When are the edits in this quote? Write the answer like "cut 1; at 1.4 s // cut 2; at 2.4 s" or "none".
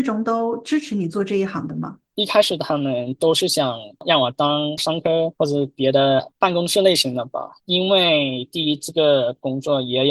cut 1; at 7.6 s